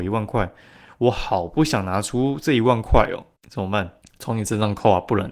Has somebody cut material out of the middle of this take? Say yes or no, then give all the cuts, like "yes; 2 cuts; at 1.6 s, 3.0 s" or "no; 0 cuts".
yes; 2 cuts; at 3.4 s, 4.0 s